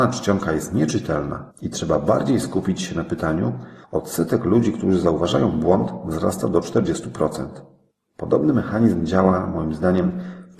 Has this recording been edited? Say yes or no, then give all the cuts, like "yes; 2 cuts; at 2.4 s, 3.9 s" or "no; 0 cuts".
yes; 3 cuts; at 1.5 s, 3.8 s, 7.9 s